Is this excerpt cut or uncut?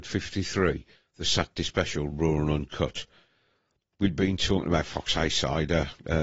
uncut